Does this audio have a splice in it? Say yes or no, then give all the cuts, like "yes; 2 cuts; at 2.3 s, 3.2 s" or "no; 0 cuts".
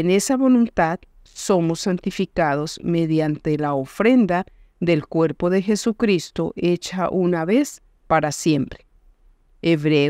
no; 0 cuts